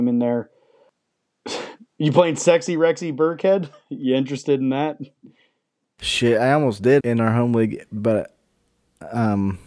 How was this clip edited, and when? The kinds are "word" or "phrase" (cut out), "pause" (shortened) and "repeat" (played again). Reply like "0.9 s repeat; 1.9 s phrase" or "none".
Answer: 7.0 s word